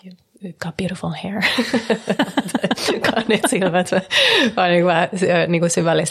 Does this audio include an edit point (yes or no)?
no